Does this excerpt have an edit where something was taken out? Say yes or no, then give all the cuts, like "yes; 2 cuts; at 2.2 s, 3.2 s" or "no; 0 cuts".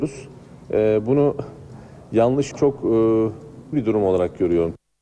yes; 2 cuts; at 2.5 s, 3.7 s